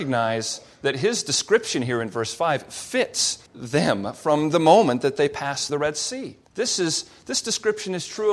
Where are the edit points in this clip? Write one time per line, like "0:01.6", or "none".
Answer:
0:03.5
0:05.7
0:06.4